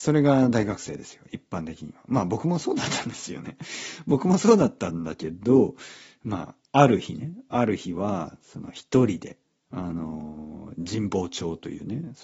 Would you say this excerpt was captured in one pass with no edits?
no; 1 cut; at 9.4 s

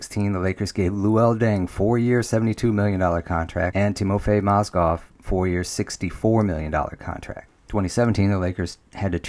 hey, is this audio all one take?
yes; 0 cuts

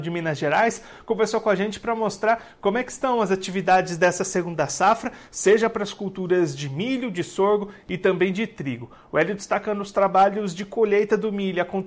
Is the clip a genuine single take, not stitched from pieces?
yes; 0 cuts

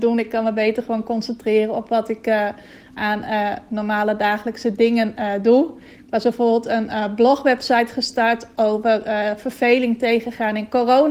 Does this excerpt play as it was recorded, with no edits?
yes; 0 cuts

